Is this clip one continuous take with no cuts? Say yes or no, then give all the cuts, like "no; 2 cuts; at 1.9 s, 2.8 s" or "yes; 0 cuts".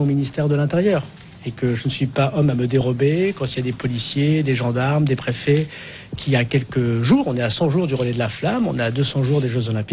yes; 0 cuts